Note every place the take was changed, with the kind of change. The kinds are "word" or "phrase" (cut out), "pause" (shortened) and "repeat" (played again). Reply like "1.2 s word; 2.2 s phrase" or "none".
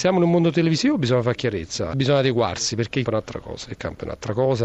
1.9 s word; 3.1 s word